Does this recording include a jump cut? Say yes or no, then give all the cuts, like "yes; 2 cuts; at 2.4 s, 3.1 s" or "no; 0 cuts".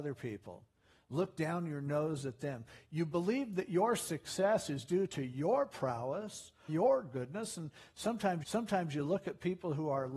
yes; 2 cuts; at 6.7 s, 8.4 s